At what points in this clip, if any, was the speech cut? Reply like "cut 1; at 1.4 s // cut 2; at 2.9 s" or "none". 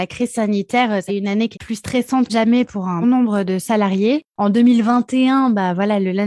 cut 1; at 1.1 s // cut 2; at 1.5 s // cut 3; at 2.3 s // cut 4; at 2.7 s // cut 5; at 3.0 s